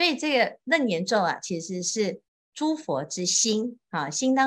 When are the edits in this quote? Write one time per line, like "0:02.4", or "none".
0:02.3